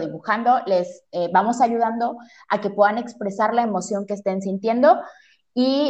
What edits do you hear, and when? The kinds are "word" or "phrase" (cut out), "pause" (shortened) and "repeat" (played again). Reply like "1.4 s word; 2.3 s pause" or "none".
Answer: none